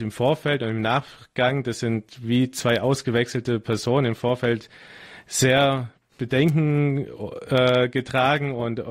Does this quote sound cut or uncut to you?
uncut